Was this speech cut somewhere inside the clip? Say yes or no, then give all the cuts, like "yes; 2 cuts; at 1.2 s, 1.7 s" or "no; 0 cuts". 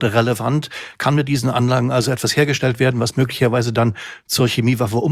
no; 0 cuts